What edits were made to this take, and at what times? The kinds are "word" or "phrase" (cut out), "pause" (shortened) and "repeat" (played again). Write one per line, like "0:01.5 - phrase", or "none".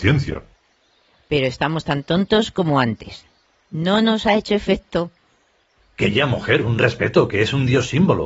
none